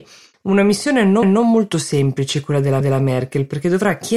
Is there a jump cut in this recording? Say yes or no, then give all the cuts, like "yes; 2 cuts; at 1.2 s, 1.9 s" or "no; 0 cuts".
yes; 2 cuts; at 1.2 s, 2.8 s